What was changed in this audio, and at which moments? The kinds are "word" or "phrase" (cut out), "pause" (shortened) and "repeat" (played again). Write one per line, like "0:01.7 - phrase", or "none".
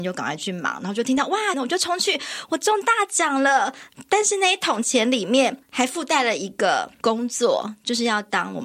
0:01.5 - phrase
0:05.6 - pause